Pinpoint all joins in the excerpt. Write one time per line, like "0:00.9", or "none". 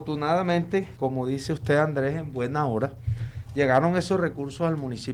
0:00.9